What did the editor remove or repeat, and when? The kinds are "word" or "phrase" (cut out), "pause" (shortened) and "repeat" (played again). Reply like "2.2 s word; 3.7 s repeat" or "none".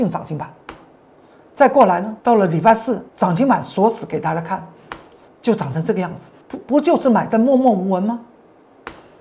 2.2 s pause; 3.1 s pause; 5.3 s pause; 6.4 s pause